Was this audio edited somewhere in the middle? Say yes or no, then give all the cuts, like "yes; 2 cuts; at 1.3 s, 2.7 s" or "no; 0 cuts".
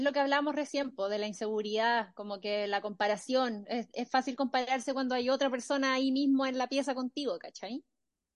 no; 0 cuts